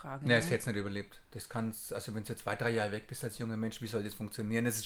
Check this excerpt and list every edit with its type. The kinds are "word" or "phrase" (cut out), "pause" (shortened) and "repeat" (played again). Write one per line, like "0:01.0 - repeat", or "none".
none